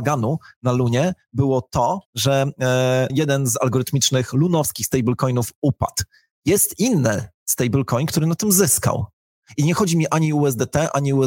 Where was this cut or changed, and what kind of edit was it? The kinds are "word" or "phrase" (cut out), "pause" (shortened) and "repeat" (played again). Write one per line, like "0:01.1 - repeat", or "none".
0:02.0 - pause
0:03.1 - word